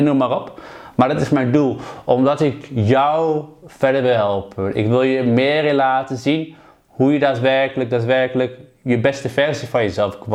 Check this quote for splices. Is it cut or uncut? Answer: uncut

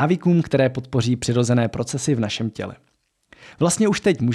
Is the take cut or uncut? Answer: uncut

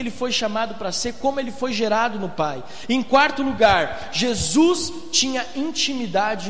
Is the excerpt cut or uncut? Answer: uncut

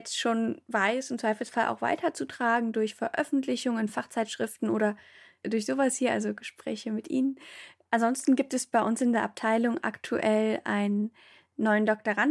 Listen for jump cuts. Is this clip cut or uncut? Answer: uncut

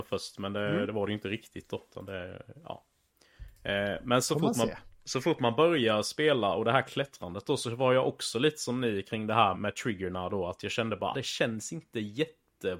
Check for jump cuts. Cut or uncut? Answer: cut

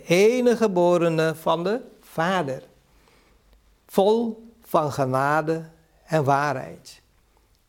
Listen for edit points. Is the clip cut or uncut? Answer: uncut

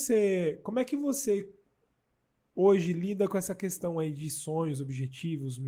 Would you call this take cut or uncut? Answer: uncut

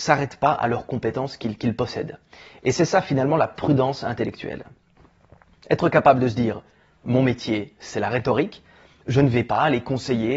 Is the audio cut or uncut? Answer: uncut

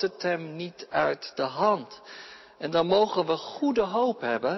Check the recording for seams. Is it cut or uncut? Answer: uncut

